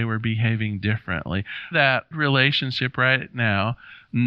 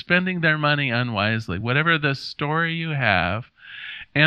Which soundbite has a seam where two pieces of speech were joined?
first; 2 cuts; at 1.7 s, 2.1 s

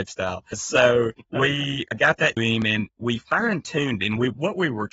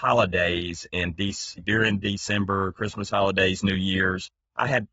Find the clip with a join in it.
first; 4 cuts; at 1.2 s, 2.4 s, 2.9 s, 4.0 s

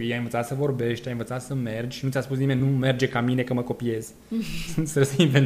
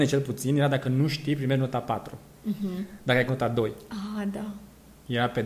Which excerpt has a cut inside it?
second; 1 cut; at 3.3 s

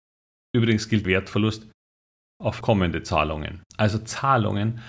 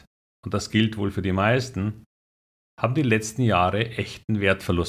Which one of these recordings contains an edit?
first; 3 cuts; at 1.0 s, 2.6 s, 3.7 s

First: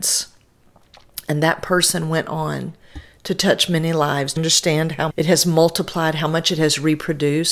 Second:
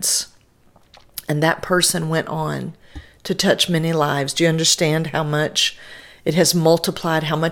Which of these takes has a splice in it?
first; 2 cuts; at 4.4 s, 5.1 s

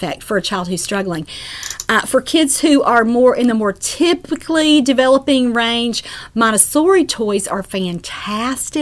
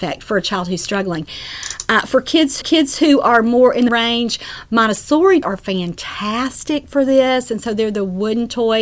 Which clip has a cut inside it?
second; 3 cuts; at 2.6 s, 3.9 s, 5.4 s

